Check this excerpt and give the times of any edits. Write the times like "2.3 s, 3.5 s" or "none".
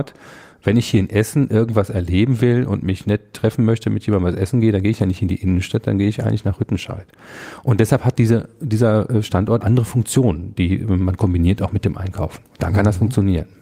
9.6 s